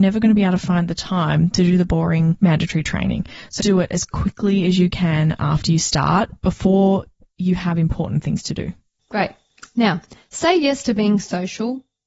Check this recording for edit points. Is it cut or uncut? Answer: cut